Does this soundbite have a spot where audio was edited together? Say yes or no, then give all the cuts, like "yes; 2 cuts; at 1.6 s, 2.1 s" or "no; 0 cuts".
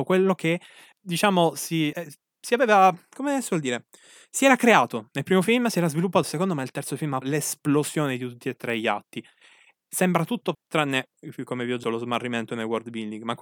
yes; 6 cuts; at 0.9 s, 1.9 s, 6.2 s, 7.2 s, 10.5 s, 11.8 s